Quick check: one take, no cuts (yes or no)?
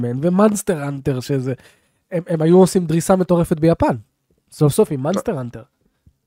yes